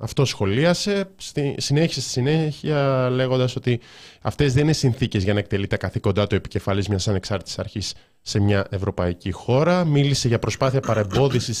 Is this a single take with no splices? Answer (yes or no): yes